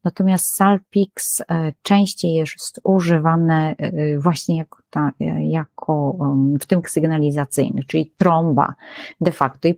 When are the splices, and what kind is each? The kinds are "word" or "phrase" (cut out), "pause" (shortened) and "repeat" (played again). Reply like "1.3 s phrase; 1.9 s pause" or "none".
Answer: 6.8 s word